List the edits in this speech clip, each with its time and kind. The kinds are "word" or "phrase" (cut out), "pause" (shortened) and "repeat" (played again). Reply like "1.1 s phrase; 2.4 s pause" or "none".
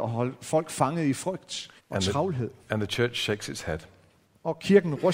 1.8 s pause